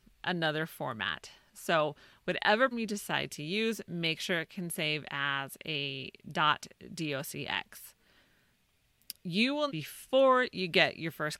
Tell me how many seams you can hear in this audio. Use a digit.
3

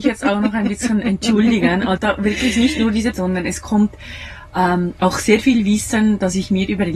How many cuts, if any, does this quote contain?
2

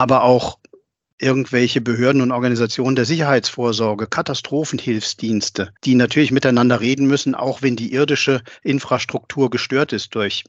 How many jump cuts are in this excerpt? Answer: 1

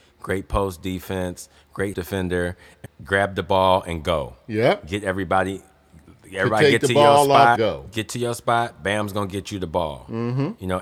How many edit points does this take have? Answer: 3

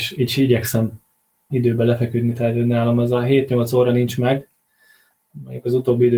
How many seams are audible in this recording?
1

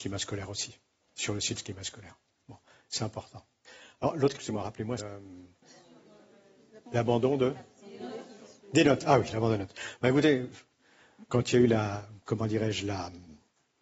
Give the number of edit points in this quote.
4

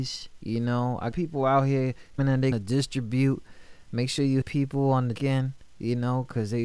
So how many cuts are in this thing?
5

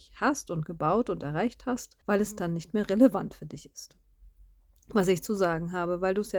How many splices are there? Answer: 1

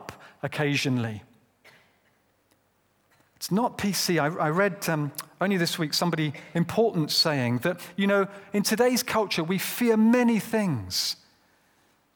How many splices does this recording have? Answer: 0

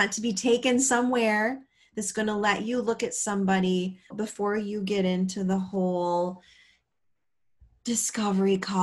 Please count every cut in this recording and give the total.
1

